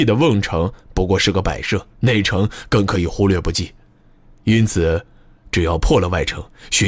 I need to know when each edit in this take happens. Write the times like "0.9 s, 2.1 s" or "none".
1.9 s